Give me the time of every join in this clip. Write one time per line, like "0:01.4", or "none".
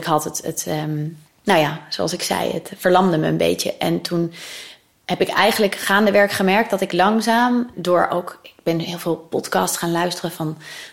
0:01.3